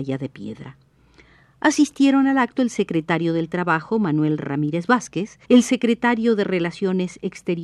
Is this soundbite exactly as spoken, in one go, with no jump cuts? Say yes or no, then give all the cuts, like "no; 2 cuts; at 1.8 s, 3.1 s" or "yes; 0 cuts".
no; 1 cut; at 5.4 s